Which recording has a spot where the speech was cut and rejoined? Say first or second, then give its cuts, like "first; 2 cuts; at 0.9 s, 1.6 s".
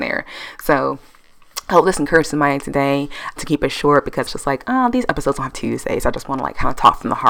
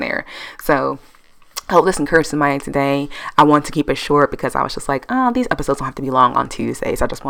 first; 3 cuts; at 3.4 s, 4.3 s, 5.5 s